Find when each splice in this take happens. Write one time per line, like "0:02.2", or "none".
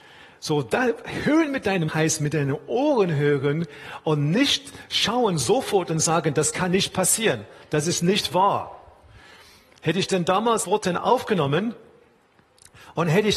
0:01.9
0:10.6